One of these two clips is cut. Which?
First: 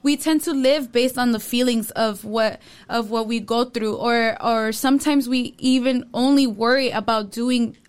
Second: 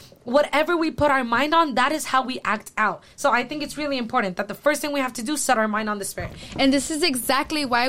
second; 1 cut; at 3.1 s

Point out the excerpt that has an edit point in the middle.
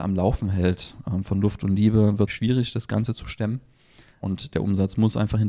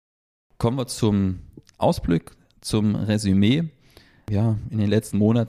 first; 1 cut; at 2.3 s

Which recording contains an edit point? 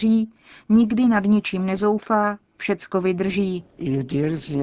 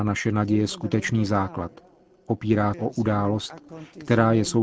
second; 1 cut; at 2.7 s

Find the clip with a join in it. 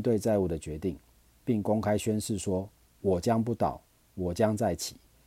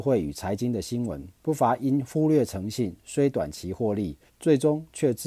second; 2 cuts; at 1.3 s, 4.3 s

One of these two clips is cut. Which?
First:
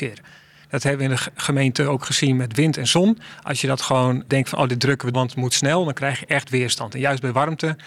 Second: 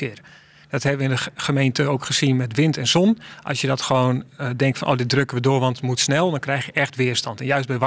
first; 2 cuts; at 4.3 s, 5.1 s

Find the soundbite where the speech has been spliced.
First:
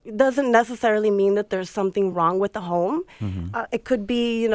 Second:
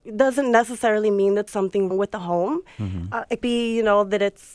second; 3 cuts; at 1.5 s, 1.9 s, 3.4 s

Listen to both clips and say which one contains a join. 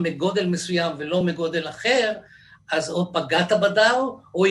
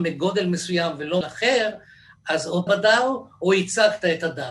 second; 2 cuts; at 1.2 s, 2.7 s

